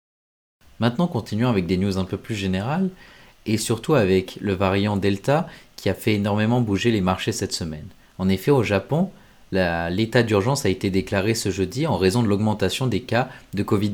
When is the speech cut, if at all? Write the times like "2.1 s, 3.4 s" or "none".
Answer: none